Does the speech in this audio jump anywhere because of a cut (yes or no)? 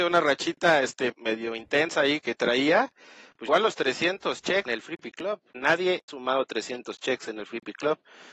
yes